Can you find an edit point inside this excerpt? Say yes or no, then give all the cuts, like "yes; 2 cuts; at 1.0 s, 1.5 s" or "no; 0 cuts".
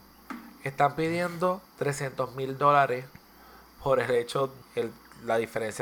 yes; 2 cuts; at 1.7 s, 4.6 s